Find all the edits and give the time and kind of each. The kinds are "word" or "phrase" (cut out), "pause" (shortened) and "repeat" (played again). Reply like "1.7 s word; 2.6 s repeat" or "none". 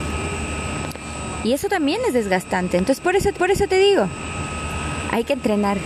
3.3 s repeat